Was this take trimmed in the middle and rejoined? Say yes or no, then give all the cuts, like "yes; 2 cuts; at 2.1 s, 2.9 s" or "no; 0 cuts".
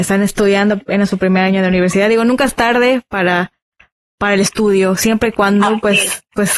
no; 0 cuts